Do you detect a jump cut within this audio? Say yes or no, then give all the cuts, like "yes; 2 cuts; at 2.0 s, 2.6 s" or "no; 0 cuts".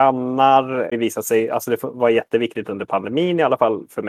yes; 1 cut; at 0.9 s